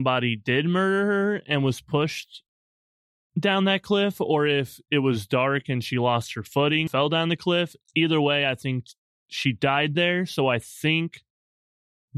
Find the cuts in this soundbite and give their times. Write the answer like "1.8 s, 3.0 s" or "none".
6.9 s